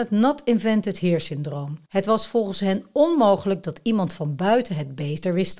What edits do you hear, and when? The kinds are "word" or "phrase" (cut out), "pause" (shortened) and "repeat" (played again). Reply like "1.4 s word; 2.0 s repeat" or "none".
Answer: 1.8 s pause